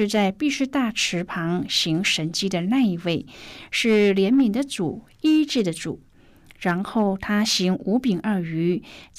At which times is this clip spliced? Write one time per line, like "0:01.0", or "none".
none